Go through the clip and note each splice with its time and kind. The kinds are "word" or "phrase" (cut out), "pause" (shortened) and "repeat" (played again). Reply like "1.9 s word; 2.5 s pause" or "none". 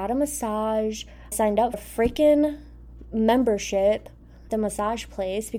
1.3 s word; 1.7 s word; 4.5 s word